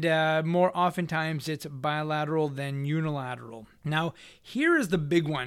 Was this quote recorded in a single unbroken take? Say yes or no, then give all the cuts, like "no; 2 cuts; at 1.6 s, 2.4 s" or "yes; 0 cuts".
no; 1 cut; at 3.8 s